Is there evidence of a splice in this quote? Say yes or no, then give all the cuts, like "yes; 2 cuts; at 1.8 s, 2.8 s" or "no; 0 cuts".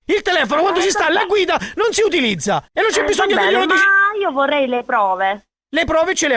yes; 1 cut; at 2.7 s